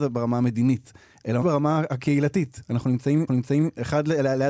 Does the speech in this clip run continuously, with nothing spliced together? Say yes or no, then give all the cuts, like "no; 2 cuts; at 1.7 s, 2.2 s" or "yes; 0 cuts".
no; 2 cuts; at 1.4 s, 3.3 s